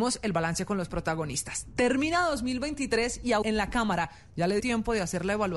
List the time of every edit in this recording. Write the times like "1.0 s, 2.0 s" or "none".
3.4 s, 4.6 s